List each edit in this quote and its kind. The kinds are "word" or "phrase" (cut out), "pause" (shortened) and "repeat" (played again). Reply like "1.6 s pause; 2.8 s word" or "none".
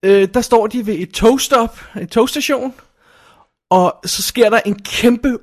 none